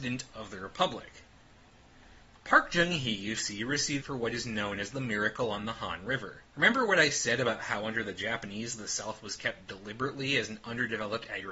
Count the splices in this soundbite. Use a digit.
3